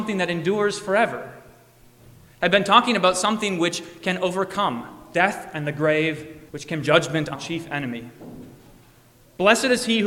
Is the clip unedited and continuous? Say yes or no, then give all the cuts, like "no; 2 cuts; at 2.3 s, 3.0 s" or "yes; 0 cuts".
no; 3 cuts; at 6.5 s, 6.8 s, 7.4 s